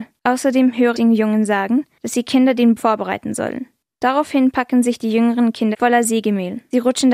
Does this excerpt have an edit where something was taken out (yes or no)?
yes